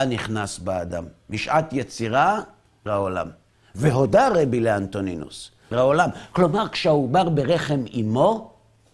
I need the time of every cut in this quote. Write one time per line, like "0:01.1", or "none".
0:02.9
0:03.5
0:05.7